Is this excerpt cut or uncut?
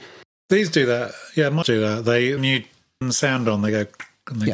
cut